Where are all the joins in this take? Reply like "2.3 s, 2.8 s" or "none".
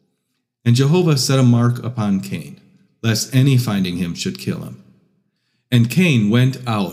none